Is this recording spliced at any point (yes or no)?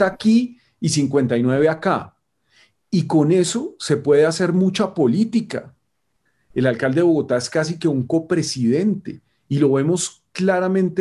no